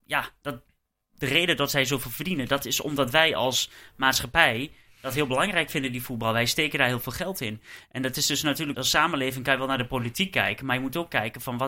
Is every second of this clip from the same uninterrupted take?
no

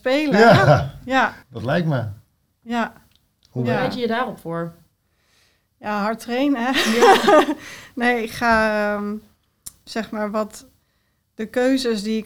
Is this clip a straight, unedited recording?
no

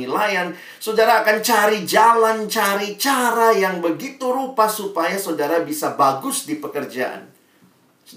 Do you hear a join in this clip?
no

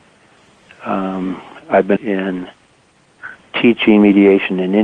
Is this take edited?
yes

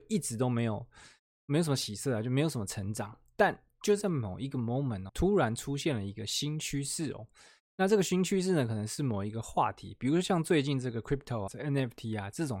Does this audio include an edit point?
yes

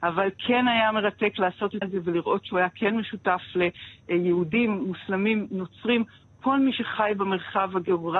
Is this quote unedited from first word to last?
no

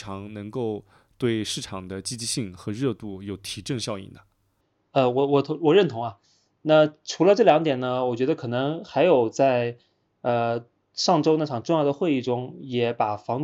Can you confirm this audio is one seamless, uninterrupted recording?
yes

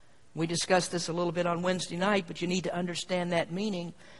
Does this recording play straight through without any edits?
yes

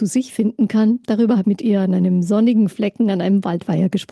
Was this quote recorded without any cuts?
no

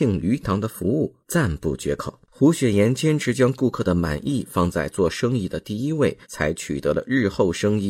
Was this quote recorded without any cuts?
no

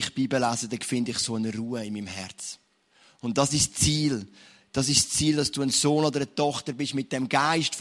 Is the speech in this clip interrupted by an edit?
no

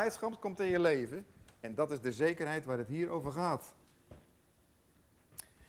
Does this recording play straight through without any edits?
yes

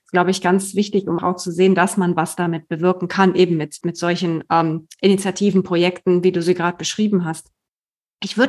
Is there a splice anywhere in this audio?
yes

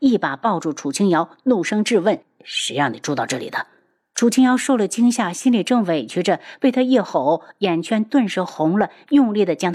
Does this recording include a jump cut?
yes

